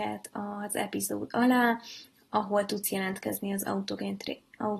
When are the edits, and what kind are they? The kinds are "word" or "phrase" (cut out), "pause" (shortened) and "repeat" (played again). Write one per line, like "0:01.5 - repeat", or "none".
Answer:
none